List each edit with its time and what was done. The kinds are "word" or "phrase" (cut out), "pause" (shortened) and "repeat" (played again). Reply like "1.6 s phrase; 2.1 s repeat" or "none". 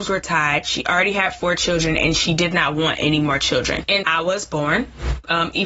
4.0 s word